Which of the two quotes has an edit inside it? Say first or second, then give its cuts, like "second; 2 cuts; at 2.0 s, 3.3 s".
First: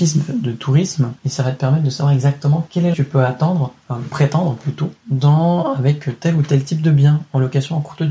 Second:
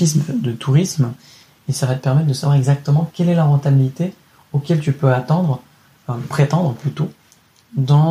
first; 4 cuts; at 1.2 s, 2.9 s, 3.8 s, 5.0 s